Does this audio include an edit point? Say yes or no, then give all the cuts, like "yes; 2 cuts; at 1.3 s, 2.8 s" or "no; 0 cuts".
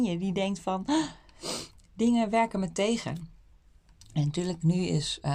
no; 0 cuts